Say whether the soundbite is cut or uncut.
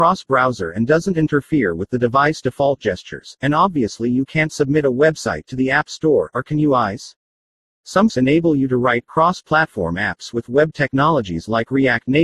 cut